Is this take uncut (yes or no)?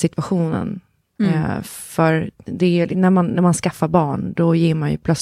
yes